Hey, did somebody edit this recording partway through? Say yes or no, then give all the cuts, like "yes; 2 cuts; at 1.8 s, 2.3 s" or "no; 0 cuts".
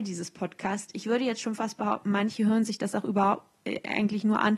no; 0 cuts